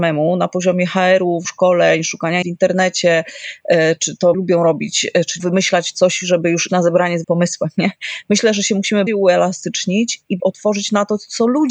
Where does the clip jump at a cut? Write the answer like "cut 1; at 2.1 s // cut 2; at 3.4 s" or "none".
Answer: cut 1; at 1.4 s // cut 2; at 2.4 s // cut 3; at 4.3 s // cut 4; at 5.4 s // cut 5; at 6.7 s // cut 6; at 7.2 s // cut 7; at 9.1 s // cut 8; at 10.4 s